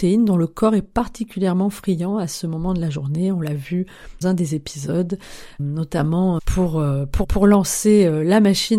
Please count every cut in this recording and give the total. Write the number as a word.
four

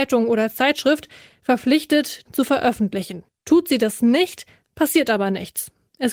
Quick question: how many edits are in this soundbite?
one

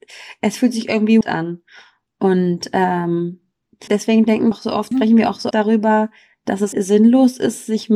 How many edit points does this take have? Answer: six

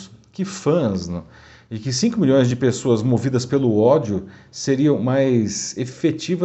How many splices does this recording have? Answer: zero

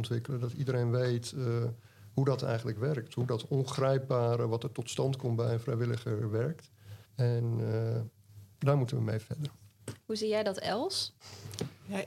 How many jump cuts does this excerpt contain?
one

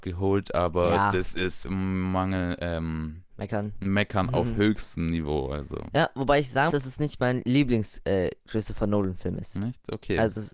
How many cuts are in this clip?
two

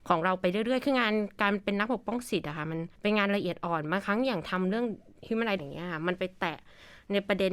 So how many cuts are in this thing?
two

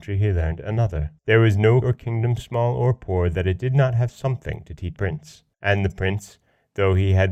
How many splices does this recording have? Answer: five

